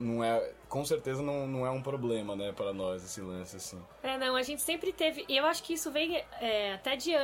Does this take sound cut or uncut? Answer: uncut